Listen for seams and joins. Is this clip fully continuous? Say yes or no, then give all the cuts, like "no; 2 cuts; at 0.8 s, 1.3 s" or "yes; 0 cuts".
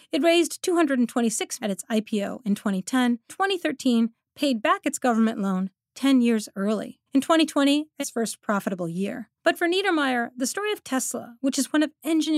no; 5 cuts; at 1.6 s, 3.3 s, 7.1 s, 8.0 s, 9.4 s